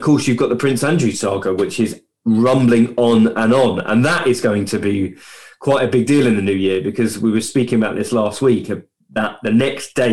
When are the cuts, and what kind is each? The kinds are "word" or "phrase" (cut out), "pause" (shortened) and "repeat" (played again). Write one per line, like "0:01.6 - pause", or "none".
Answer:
none